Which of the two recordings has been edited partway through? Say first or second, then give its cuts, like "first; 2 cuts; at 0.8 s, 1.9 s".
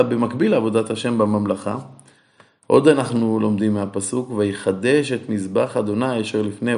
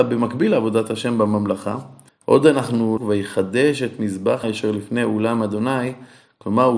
second; 3 cuts; at 2.1 s, 3.0 s, 4.4 s